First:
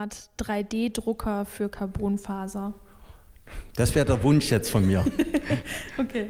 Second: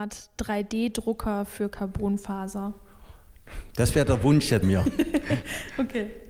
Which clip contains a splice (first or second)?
second